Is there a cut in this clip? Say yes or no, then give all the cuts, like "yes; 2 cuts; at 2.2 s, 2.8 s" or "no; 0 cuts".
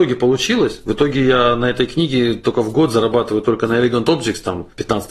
no; 0 cuts